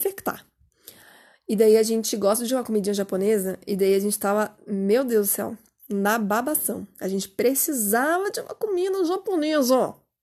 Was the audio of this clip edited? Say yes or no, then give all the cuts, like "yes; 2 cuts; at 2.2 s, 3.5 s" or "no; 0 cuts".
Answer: no; 0 cuts